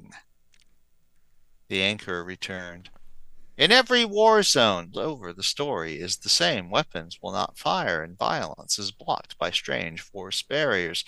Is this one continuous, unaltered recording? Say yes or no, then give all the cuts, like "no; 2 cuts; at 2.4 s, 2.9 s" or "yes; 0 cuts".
no; 1 cut; at 4.9 s